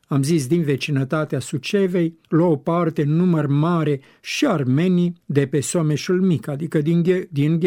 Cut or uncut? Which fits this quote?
cut